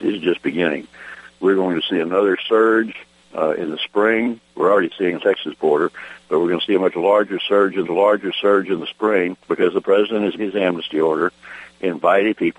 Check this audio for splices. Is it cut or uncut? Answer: cut